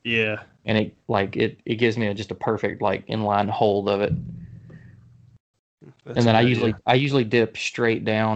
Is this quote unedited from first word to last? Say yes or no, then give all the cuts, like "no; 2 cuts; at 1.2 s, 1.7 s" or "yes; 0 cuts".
yes; 0 cuts